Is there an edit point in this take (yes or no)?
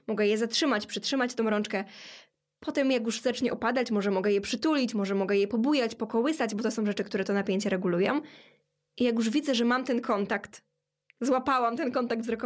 no